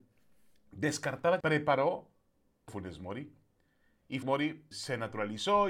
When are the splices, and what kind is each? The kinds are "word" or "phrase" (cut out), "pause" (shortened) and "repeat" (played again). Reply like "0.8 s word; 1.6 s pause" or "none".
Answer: 1.4 s word; 2.7 s word; 4.2 s word; 4.7 s word